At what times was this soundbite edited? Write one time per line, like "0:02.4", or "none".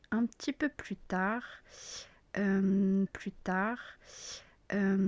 0:03.1